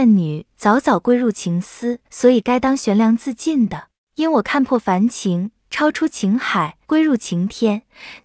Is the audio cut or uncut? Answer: cut